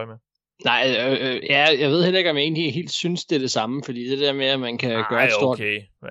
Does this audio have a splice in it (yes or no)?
no